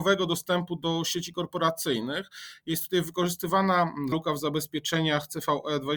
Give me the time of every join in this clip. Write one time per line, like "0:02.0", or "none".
0:04.1